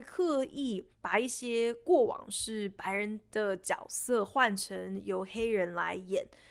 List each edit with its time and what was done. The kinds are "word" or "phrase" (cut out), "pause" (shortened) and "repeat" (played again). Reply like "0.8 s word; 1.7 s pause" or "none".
0.9 s pause

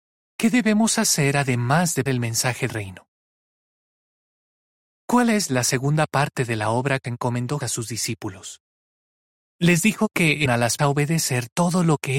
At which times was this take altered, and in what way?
2.1 s word; 2.7 s word; 7.0 s word; 7.6 s word; 10.5 s word; 10.8 s word

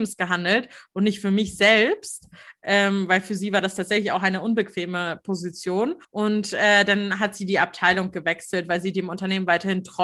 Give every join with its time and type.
6.0 s pause

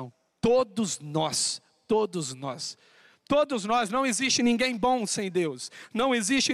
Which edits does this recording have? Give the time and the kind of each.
none

